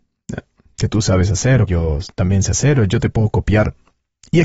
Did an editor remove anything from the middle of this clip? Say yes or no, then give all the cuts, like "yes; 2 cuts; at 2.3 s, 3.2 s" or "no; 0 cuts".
yes; 1 cut; at 1.7 s